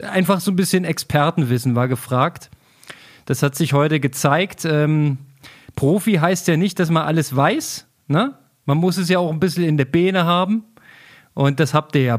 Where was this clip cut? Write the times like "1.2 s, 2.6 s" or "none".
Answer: none